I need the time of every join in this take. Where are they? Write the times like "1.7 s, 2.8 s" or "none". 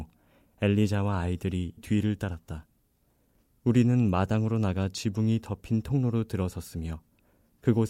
1.8 s